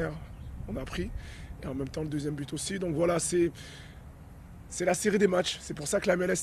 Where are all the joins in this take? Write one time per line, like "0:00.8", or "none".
none